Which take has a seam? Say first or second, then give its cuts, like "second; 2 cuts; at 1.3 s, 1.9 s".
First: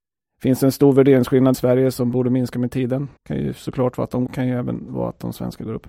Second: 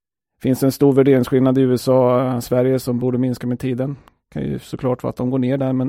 first; 3 cuts; at 1.5 s, 3.2 s, 4.3 s